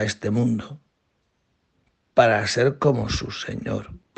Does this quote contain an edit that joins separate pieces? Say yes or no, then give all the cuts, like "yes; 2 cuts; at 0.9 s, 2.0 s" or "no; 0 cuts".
no; 0 cuts